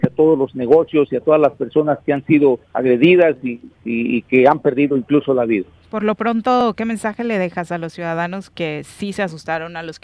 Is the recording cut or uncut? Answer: cut